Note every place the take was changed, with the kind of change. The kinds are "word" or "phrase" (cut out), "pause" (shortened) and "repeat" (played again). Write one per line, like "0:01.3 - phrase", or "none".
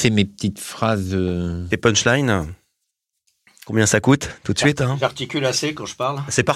none